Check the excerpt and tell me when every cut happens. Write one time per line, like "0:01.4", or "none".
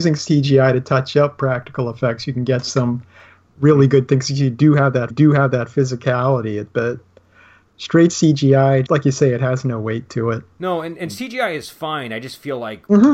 0:05.1
0:08.9